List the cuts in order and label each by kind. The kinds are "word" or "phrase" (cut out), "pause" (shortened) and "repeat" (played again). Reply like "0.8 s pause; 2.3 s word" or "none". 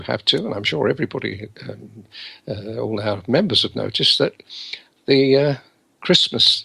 none